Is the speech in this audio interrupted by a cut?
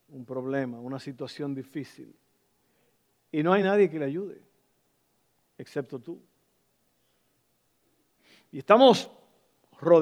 no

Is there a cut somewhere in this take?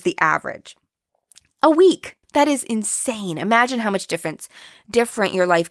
yes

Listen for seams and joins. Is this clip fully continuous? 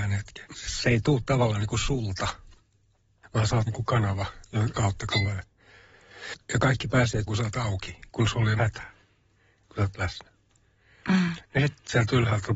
no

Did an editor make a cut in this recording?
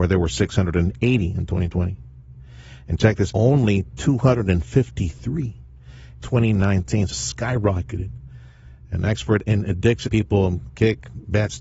yes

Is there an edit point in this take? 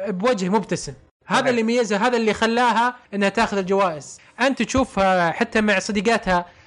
yes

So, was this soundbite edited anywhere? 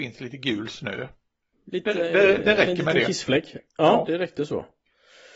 no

